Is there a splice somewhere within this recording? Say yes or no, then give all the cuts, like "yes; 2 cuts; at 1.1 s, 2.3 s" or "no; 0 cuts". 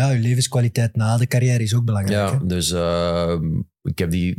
no; 0 cuts